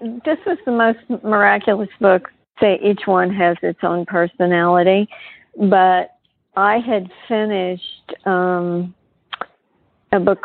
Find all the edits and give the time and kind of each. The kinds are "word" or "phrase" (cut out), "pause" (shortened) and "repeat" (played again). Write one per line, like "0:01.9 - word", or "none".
none